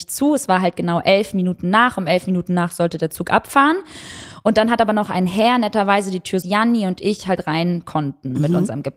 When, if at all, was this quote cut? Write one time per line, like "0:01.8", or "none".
0:06.4